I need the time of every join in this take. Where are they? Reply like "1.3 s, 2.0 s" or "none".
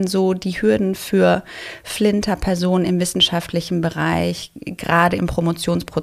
none